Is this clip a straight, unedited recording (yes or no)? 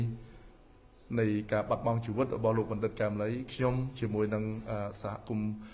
yes